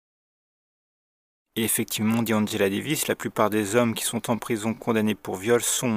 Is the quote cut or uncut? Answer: uncut